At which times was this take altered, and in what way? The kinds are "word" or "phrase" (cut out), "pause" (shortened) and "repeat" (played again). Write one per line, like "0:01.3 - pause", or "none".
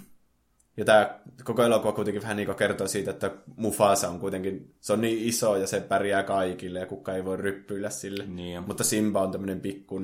none